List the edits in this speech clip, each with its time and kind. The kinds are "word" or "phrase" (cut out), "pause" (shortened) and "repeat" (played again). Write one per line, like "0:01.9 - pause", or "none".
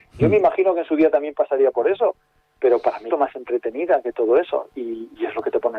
0:03.1 - phrase

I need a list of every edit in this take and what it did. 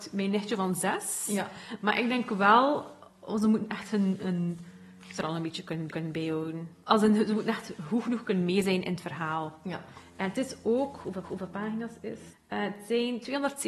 0:05.2 - phrase
0:05.9 - repeat
0:11.2 - repeat

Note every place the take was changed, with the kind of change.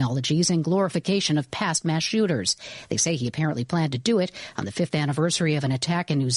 none

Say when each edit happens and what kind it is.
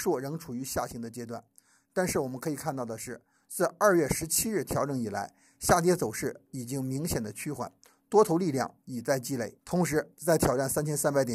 0:09.6 - pause

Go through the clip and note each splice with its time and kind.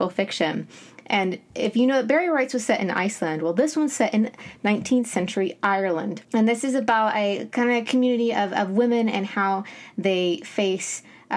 0:06.2 - pause

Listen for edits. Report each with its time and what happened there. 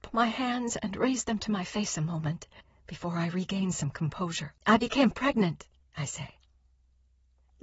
0:02.6 - pause
0:04.6 - pause
0:05.8 - pause

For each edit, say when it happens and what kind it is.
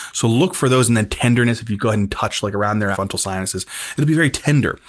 0:02.9 - phrase

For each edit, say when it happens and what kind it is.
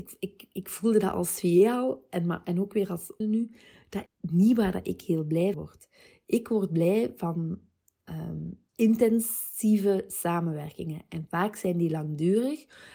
0:03.2 - phrase
0:04.1 - word
0:05.5 - word
0:08.7 - pause

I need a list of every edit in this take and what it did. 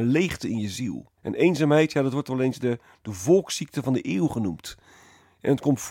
0:01.2 - pause

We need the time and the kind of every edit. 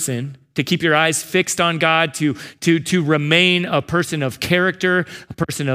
none

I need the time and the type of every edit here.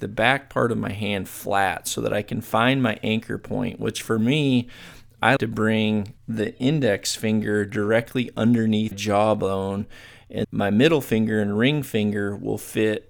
0:05.4 - word
0:06.2 - pause
0:08.9 - word
0:10.4 - word

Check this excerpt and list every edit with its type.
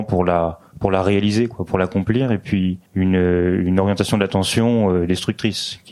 0:02.9 - pause

